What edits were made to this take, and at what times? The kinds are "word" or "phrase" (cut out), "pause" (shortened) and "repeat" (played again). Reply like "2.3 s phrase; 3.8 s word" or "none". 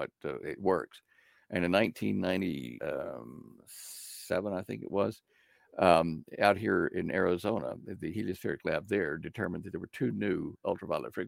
none

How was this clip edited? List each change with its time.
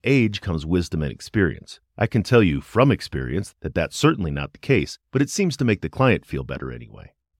1.9 s pause; 5.1 s pause

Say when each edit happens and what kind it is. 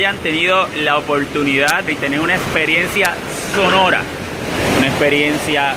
1.9 s word

